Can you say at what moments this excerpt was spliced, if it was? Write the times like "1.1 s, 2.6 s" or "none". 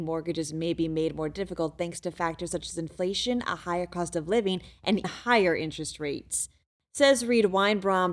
5.0 s